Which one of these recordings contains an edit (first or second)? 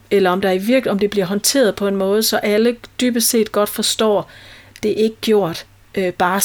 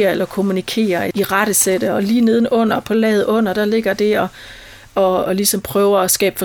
second